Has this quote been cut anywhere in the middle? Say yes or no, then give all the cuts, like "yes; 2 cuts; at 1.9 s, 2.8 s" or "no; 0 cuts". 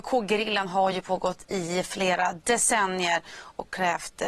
no; 0 cuts